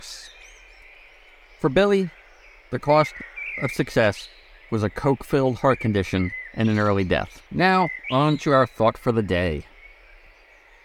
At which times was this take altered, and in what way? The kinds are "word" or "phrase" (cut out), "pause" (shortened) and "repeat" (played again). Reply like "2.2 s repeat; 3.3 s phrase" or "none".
7.5 s pause

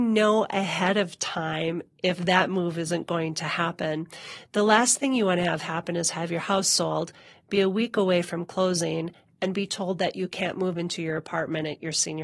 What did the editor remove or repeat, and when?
none

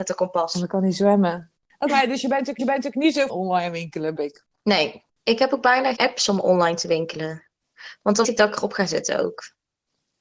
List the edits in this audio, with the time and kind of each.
1.9 s word; 2.6 s repeat; 3.3 s phrase; 4.2 s word; 6.0 s word; 8.2 s word

